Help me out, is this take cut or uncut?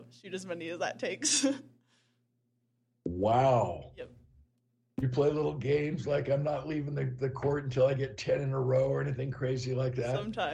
uncut